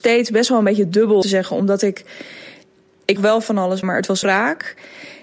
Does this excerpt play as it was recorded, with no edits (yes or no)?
no